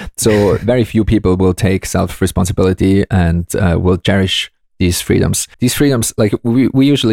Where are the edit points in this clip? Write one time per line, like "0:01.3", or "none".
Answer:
0:05.5